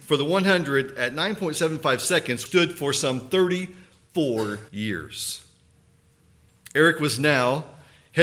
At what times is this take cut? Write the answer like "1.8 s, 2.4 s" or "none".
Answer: 2.5 s, 4.7 s